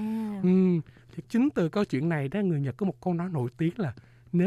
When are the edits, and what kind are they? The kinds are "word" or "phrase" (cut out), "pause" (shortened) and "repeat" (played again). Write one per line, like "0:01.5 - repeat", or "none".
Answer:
0:01.2 - word